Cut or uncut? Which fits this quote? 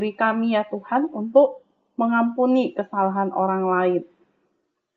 uncut